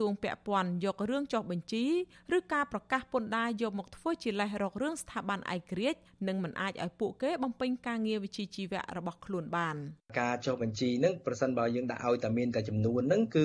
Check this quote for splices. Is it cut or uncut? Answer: uncut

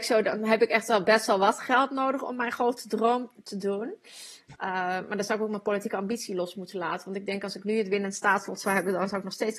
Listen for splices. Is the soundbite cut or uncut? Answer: uncut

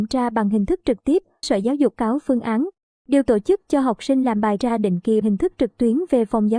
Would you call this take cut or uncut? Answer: cut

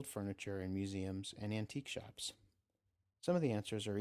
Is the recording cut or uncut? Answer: uncut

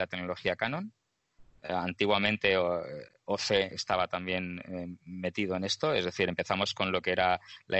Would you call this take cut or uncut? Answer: uncut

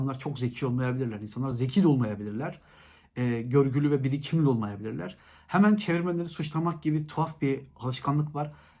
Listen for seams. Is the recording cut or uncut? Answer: uncut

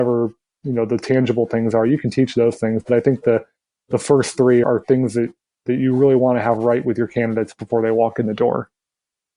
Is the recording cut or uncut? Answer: cut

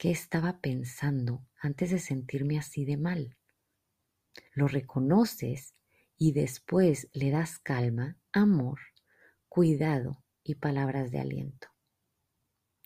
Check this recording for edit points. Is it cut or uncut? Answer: cut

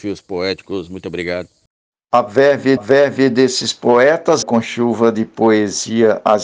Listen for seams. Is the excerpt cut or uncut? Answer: cut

